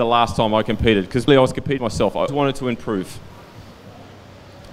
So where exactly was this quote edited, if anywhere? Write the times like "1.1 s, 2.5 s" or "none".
1.3 s, 1.8 s, 2.3 s